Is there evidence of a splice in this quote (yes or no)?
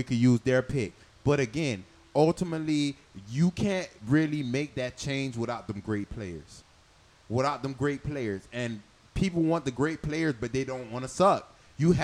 no